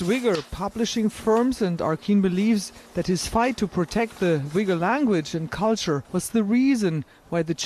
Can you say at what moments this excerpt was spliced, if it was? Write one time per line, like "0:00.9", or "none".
0:02.9
0:06.0